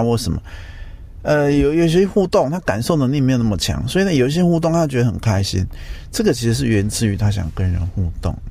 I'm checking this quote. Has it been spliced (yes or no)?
no